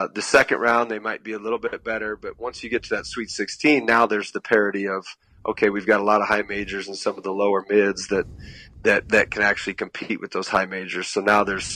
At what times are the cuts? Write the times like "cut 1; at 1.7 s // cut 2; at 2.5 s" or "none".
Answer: none

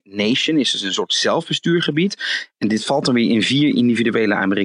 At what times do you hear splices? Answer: none

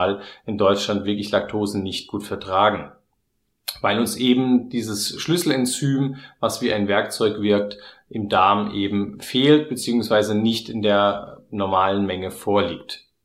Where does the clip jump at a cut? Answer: none

